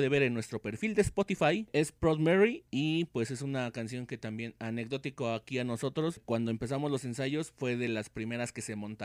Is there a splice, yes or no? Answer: no